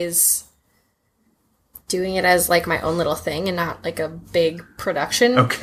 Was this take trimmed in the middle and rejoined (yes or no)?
no